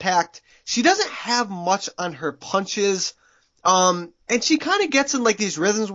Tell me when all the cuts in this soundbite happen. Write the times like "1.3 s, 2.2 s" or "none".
4.2 s